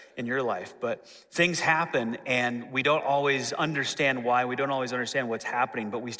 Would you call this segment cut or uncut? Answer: uncut